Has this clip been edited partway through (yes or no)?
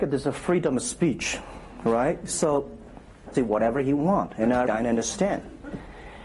yes